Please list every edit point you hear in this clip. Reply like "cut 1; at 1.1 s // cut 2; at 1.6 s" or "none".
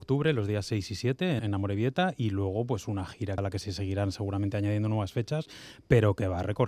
cut 1; at 1.4 s // cut 2; at 3.4 s